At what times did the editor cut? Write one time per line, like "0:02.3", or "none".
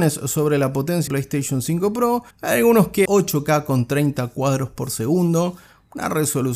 0:01.1
0:02.3
0:03.1